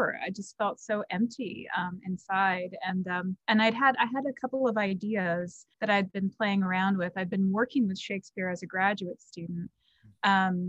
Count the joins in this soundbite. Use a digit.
2